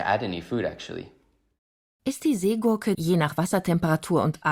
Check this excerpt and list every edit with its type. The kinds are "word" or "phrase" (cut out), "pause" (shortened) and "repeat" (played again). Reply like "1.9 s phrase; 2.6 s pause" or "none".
2.9 s word